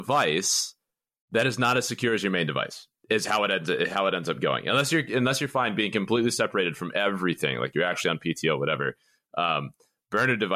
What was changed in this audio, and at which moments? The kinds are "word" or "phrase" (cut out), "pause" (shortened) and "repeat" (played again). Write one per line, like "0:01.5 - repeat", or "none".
0:03.0 - pause
0:03.9 - word